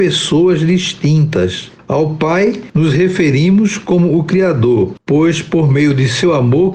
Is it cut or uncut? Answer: uncut